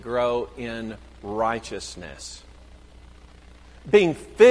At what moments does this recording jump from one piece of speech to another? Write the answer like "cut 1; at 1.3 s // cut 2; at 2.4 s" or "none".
none